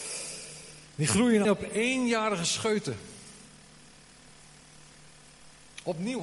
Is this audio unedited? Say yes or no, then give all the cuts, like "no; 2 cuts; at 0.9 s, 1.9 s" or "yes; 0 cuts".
no; 1 cut; at 1.4 s